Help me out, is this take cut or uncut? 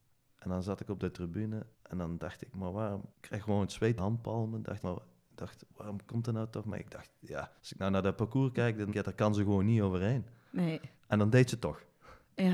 cut